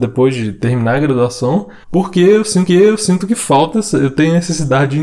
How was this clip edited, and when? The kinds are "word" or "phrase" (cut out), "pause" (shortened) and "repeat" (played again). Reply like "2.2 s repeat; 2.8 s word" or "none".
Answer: 1.8 s pause; 2.7 s repeat